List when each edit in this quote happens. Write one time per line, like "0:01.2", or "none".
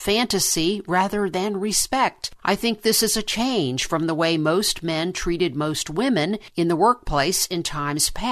none